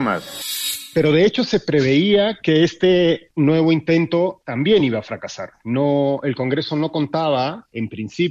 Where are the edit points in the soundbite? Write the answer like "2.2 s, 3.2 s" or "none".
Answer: none